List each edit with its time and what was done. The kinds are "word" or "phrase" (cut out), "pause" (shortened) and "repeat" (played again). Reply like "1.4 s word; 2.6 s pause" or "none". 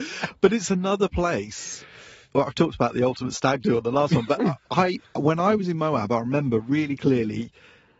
none